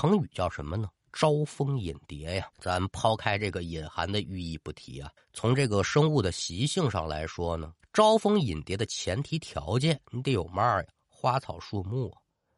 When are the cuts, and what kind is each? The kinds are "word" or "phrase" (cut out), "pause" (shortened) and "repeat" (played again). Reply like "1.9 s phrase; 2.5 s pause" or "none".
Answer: 2.5 s pause; 5.2 s pause; 7.8 s pause